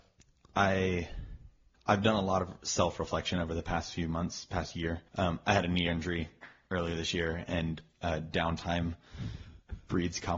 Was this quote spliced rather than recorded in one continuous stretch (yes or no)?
yes